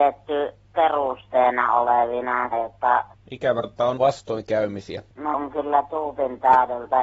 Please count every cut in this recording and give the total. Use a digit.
4